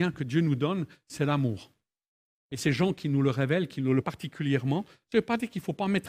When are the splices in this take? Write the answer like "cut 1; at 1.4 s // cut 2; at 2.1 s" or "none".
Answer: cut 1; at 4.0 s